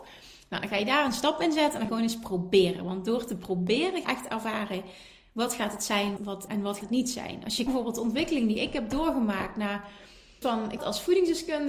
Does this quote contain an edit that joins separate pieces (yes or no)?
yes